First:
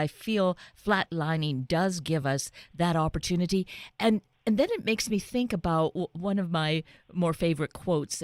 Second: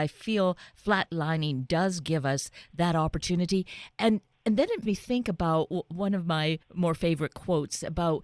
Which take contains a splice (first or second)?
second